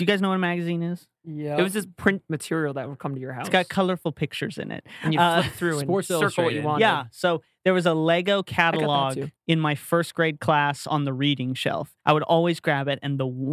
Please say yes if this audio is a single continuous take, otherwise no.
no